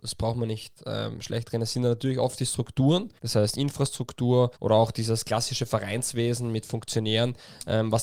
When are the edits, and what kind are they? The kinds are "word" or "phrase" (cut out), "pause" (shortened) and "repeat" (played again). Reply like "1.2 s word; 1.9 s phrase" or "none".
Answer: 3.2 s pause; 4.5 s pause